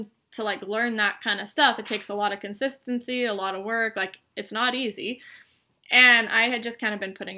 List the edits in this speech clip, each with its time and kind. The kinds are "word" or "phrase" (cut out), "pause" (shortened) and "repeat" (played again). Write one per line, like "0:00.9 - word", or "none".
none